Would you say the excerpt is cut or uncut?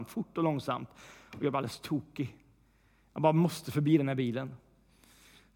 uncut